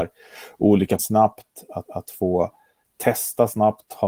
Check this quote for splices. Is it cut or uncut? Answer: cut